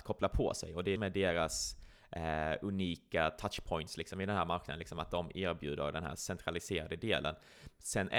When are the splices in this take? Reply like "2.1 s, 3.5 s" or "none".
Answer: 1.0 s